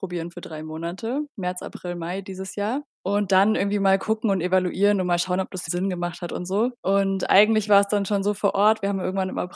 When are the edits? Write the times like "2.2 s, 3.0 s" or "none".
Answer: 2.9 s, 5.7 s, 6.8 s